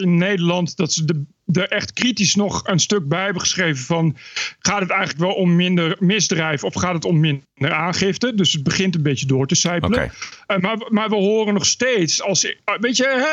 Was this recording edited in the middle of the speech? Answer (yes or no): no